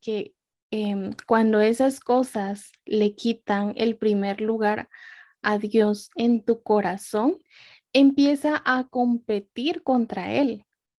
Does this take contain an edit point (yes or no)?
no